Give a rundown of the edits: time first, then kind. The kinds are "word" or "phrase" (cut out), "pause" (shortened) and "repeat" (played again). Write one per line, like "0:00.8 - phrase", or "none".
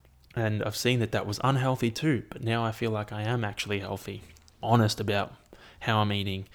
0:04.6 - phrase